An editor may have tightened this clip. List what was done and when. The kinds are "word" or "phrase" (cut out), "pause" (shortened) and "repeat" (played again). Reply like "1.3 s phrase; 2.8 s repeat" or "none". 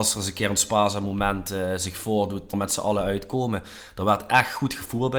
2.5 s word